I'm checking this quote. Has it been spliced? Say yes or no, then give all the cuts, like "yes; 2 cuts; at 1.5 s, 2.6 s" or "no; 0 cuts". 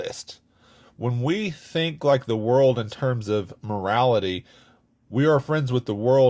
no; 0 cuts